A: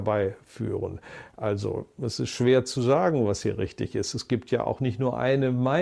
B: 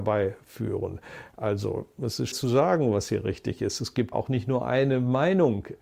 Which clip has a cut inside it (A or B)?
B